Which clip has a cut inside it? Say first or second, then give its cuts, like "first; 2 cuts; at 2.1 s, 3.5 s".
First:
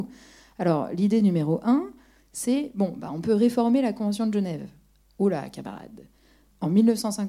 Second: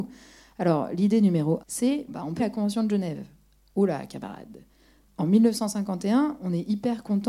second; 3 cuts; at 1.6 s, 2.1 s, 2.4 s